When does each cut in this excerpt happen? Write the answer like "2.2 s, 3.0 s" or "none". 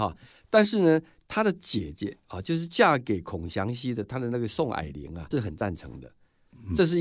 5.3 s